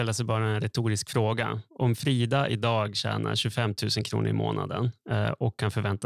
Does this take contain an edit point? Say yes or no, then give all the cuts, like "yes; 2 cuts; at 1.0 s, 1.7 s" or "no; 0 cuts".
no; 0 cuts